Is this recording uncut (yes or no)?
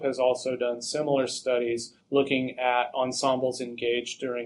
no